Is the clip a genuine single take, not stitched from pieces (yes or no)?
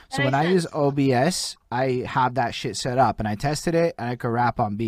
yes